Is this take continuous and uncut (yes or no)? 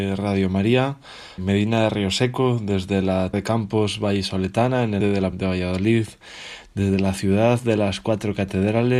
no